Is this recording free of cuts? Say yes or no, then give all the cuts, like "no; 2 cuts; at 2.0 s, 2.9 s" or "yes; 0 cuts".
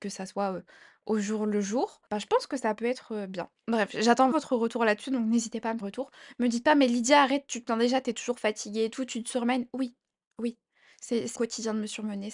no; 4 cuts; at 2.1 s, 4.3 s, 5.8 s, 11.4 s